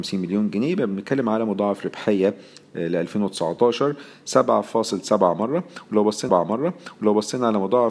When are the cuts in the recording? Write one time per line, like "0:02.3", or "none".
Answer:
0:06.3